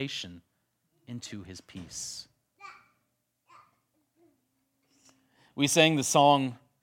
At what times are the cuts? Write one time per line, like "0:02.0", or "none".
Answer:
none